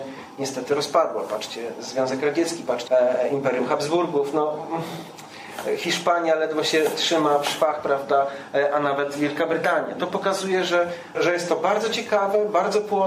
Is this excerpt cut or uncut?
cut